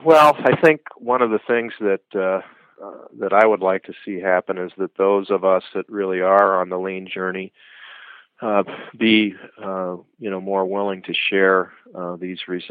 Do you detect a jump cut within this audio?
no; 0 cuts

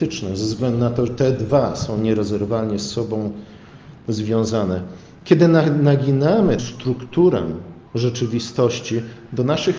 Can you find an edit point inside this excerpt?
yes; 3 cuts; at 1.1 s, 6.6 s, 7.9 s

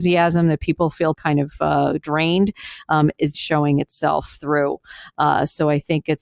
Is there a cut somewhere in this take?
yes; 2 cuts; at 1.1 s, 3.3 s

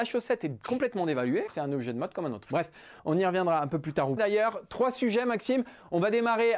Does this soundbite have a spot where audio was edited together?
yes; 3 cuts; at 1.5 s, 3.0 s, 4.2 s

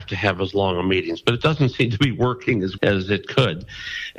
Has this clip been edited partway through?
yes; 1 cut; at 2.8 s

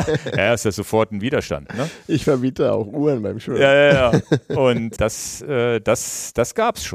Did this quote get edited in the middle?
yes; 1 cut; at 5.0 s

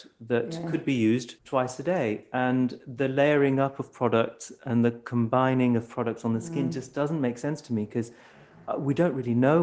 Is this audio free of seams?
no; 1 cut; at 1.4 s

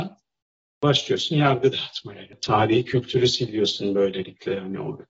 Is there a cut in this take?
no; 0 cuts

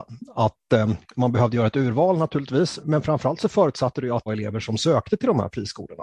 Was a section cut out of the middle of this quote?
yes; 2 cuts; at 2.8 s, 4.3 s

